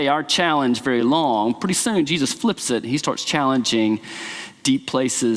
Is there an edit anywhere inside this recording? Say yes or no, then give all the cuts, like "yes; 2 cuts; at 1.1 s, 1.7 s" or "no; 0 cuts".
no; 0 cuts